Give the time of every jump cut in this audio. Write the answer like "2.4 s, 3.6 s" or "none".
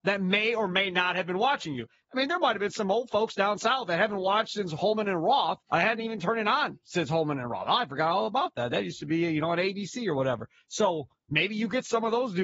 5.6 s